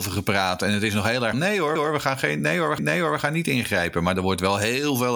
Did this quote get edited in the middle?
yes; 3 cuts; at 1.3 s, 1.8 s, 2.8 s

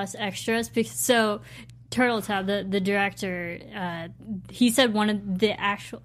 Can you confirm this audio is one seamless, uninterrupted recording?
yes; 0 cuts

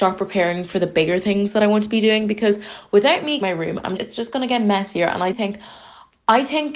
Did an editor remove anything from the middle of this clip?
yes; 3 cuts; at 3.4 s, 4.0 s, 5.3 s

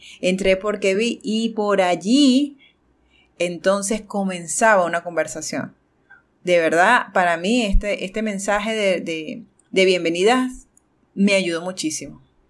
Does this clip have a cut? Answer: no; 0 cuts

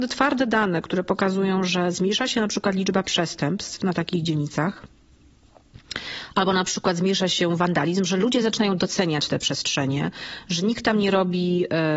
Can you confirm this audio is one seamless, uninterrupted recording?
yes; 0 cuts

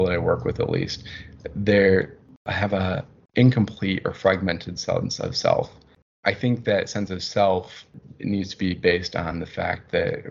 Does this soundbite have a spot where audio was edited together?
no; 0 cuts

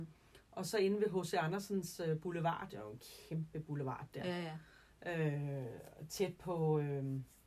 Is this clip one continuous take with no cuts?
yes; 0 cuts

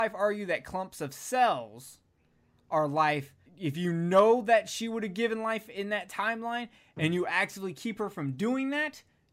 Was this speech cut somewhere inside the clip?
yes; 1 cut; at 3.5 s

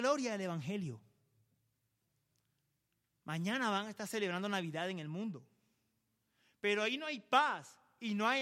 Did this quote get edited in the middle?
no; 0 cuts

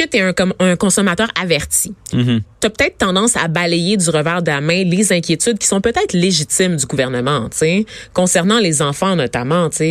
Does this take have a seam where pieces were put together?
no; 0 cuts

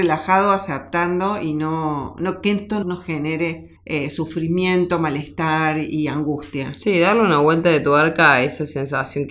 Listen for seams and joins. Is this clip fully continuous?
no; 2 cuts; at 2.8 s, 3.8 s

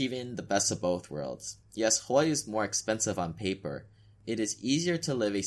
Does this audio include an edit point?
no; 0 cuts

